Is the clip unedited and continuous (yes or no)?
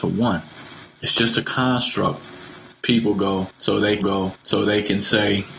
no